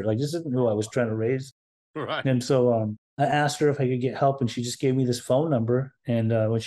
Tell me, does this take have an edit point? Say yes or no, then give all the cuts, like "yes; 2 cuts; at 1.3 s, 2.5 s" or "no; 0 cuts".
no; 0 cuts